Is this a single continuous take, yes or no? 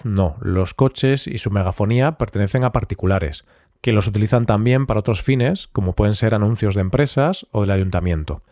yes